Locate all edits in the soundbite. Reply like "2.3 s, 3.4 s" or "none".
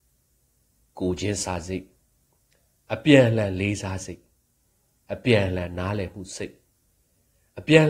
none